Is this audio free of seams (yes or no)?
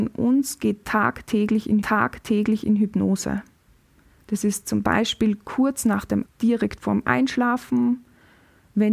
no